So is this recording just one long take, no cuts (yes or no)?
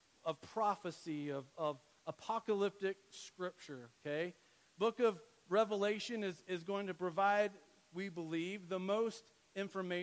yes